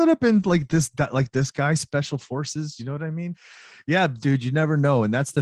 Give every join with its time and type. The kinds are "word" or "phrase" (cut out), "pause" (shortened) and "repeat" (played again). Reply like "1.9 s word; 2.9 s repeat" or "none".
none